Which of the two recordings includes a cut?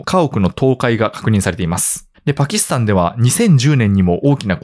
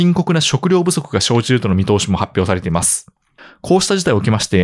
first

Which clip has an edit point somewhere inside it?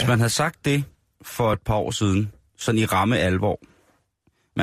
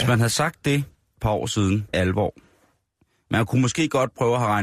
second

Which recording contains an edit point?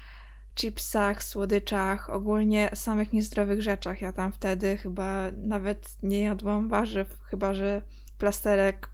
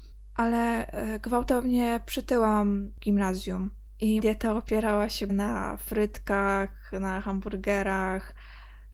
second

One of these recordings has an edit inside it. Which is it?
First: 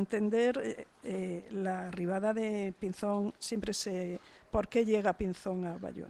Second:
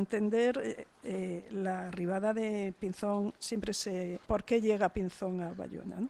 second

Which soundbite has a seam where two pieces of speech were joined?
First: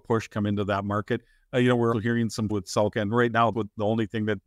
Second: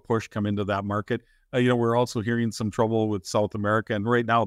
first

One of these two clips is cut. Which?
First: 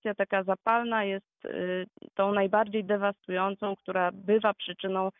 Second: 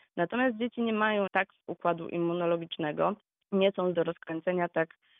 second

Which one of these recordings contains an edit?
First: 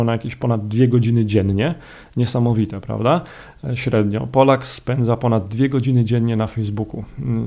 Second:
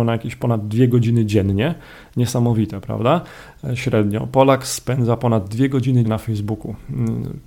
second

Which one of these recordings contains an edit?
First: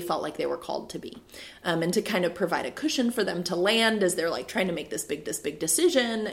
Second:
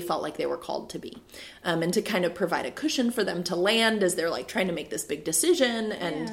first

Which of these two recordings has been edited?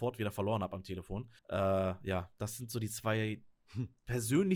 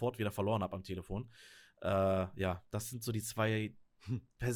first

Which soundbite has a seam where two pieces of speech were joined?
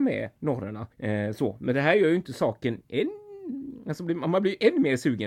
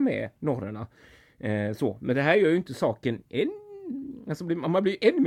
first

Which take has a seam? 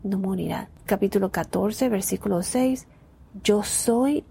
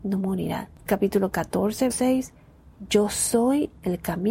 second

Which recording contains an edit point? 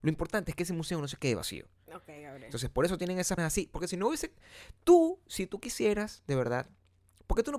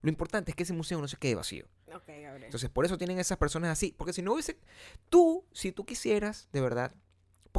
first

